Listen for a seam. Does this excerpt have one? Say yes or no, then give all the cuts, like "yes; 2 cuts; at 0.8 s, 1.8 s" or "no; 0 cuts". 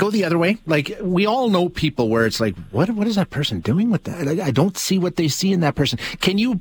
no; 0 cuts